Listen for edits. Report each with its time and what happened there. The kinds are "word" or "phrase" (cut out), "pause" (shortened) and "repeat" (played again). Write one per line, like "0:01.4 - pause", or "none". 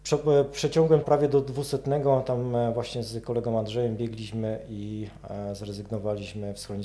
0:01.0 - word